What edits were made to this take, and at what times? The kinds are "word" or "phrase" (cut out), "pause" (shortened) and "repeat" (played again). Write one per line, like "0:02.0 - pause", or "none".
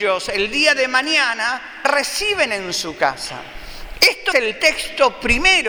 0:01.8 - word
0:04.3 - word